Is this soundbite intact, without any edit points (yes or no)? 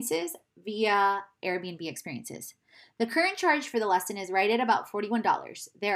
yes